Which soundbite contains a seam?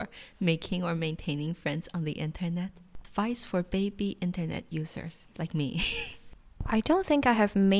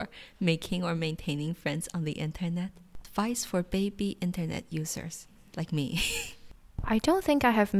first; 1 cut; at 5.3 s

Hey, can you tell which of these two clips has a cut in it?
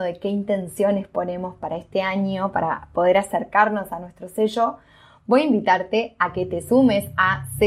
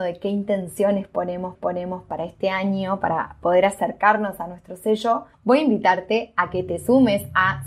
second; 2 cuts; at 1.5 s, 5.3 s

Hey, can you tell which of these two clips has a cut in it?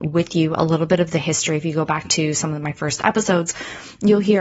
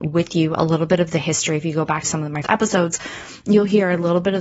second; 2 cuts; at 2.0 s, 2.4 s

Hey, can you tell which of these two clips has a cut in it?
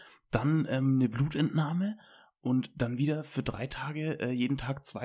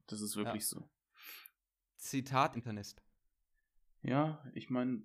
second; 1 cut; at 2.5 s

